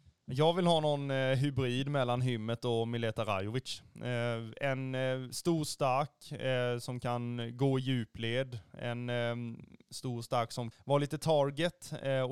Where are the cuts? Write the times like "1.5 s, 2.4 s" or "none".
10.7 s